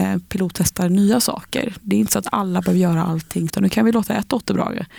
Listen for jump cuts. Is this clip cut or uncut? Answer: cut